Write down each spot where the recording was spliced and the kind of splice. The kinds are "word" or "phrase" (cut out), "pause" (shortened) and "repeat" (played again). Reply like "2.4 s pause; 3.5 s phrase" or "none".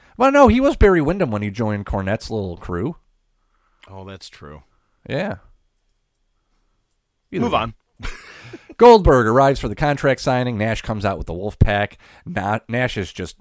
none

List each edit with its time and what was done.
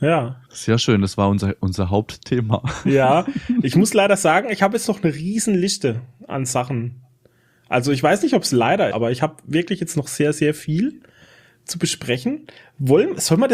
8.9 s word

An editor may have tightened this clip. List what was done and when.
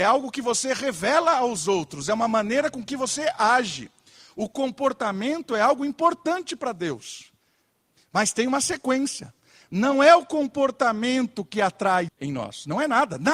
12.1 s word

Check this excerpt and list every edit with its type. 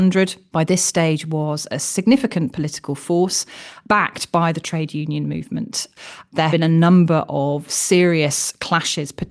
6.5 s word

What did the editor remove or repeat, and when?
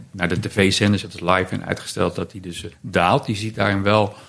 1.0 s word; 2.7 s pause

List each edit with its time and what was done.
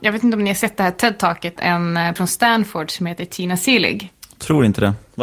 1.6 s word; 2.2 s word

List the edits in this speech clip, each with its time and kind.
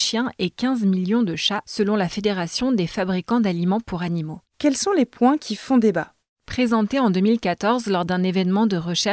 none

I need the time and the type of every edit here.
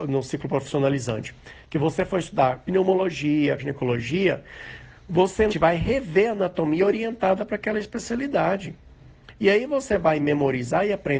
3.6 s word; 5.5 s word

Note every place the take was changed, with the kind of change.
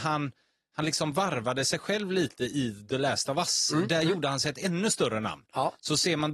none

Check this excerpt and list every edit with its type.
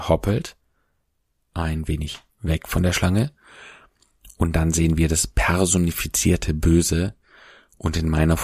2.3 s pause

